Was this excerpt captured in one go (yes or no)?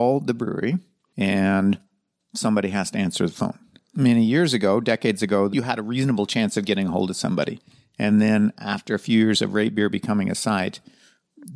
yes